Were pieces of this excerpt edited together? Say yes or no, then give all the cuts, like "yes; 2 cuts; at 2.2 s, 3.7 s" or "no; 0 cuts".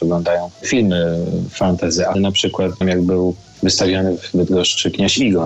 yes; 2 cuts; at 2.1 s, 2.8 s